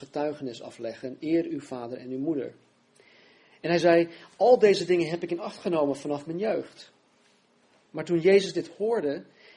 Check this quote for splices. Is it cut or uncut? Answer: uncut